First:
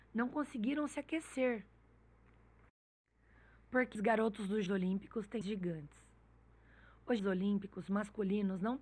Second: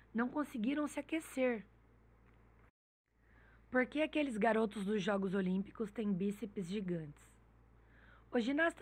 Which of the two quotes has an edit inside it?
first; 4 cuts; at 4.0 s, 4.7 s, 5.4 s, 7.2 s

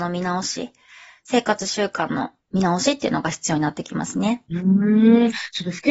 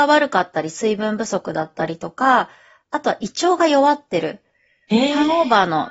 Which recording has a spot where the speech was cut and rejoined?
first; 1 cut; at 4.5 s

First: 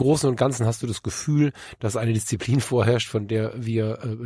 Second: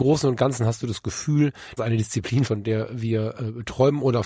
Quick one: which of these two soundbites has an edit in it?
second; 2 cuts; at 1.8 s, 2.5 s

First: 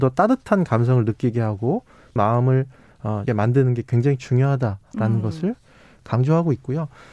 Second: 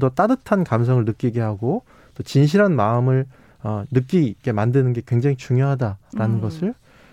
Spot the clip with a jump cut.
first; 2 cuts; at 2.2 s, 3.3 s

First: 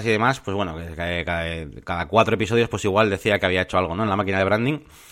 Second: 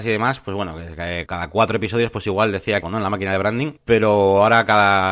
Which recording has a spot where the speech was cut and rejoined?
second; 3 cuts; at 1.3 s, 2.8 s, 3.8 s

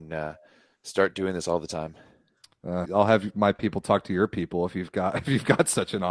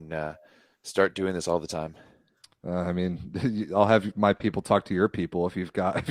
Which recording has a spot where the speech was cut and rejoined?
first; 1 cut; at 2.9 s

